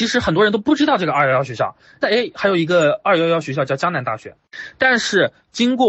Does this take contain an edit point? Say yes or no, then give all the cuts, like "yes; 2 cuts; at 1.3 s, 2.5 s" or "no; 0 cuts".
yes; 1 cut; at 2.0 s